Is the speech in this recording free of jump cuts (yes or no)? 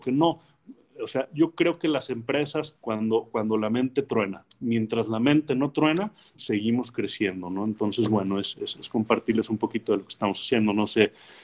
no